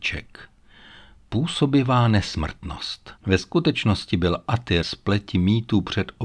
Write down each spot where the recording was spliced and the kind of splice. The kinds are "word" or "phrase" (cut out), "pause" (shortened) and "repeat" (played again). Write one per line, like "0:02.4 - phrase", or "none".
0:03.2 - pause
0:04.8 - word